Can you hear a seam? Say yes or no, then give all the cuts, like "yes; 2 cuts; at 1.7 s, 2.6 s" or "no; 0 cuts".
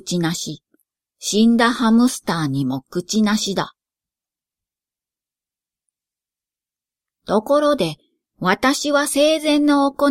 no; 0 cuts